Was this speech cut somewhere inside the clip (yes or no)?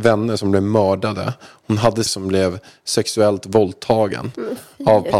yes